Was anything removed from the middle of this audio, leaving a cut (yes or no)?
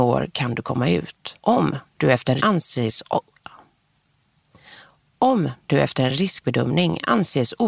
yes